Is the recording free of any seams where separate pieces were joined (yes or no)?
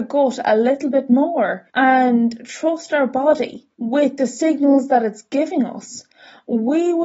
no